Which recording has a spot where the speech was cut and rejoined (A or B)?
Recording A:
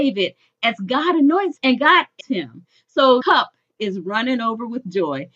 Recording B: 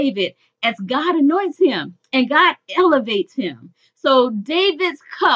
A